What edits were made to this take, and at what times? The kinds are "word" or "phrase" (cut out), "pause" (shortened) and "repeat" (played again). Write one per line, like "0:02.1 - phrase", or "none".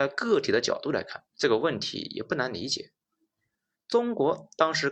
0:01.3 - pause